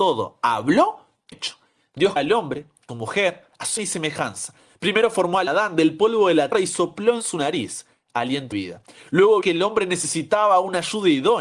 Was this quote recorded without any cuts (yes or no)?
no